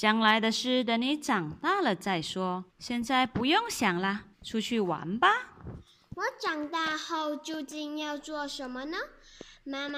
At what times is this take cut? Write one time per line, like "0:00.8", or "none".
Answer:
0:02.7
0:04.3